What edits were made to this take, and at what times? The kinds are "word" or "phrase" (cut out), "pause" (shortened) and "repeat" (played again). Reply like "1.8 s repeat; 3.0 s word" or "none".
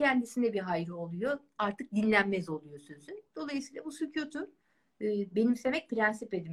none